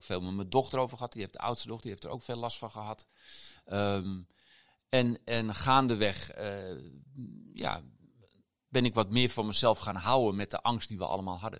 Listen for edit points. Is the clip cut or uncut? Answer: uncut